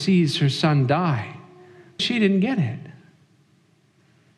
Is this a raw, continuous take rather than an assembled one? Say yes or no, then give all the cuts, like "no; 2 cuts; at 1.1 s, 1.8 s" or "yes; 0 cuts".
no; 1 cut; at 2.0 s